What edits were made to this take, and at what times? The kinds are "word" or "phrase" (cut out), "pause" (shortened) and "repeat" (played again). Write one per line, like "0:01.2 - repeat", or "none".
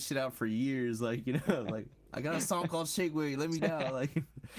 0:03.6 - phrase